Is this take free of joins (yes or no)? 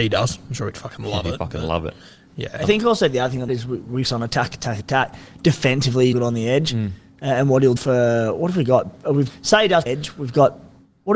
no